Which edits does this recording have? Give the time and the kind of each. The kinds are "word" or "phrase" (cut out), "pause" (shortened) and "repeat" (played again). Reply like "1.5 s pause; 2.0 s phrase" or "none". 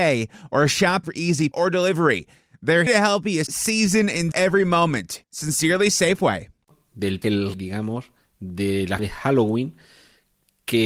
1.0 s word; 1.5 s word; 2.9 s word; 3.5 s word; 4.3 s word; 7.2 s word; 7.5 s word; 9.0 s word